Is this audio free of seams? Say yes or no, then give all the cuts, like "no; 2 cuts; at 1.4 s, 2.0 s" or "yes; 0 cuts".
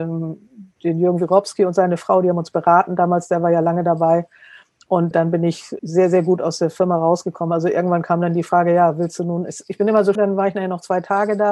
no; 3 cuts; at 5.1 s, 5.8 s, 10.2 s